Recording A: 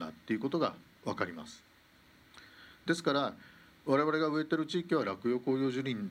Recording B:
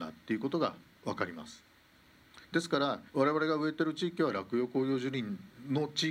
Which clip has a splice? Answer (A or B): B